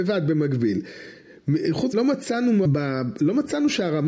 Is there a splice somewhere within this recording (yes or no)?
yes